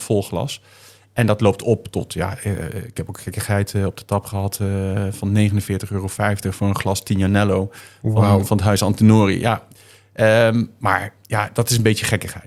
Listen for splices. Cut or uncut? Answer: uncut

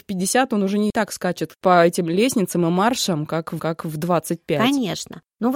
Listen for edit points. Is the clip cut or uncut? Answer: cut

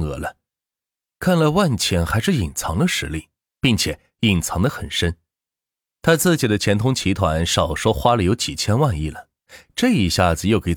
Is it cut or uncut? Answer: uncut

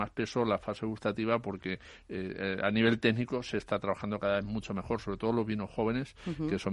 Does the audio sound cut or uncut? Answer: uncut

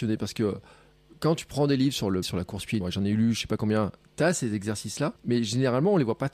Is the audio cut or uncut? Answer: cut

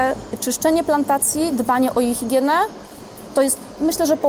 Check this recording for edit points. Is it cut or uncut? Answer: uncut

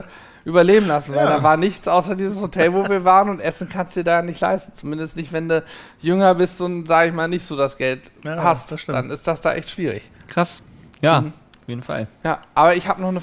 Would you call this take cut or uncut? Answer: cut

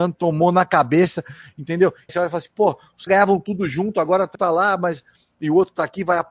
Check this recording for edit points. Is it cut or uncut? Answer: cut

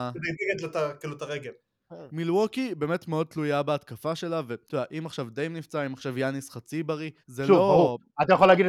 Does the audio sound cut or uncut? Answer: cut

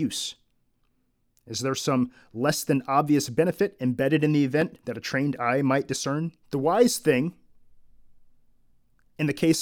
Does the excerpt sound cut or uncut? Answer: cut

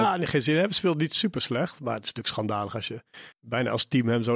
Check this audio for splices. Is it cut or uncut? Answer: cut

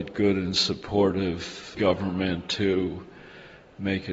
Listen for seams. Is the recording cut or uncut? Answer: cut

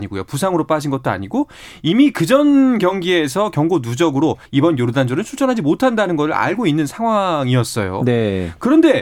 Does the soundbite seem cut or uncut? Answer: cut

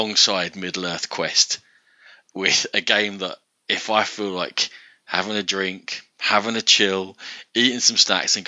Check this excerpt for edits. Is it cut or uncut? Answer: uncut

